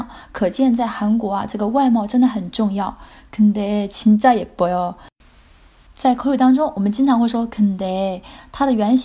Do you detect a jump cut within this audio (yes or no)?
no